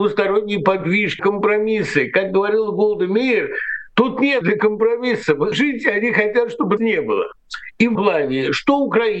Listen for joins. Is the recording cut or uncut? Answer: cut